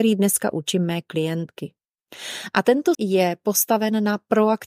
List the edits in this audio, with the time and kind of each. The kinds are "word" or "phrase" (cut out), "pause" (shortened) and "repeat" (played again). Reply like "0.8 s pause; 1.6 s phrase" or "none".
2.9 s word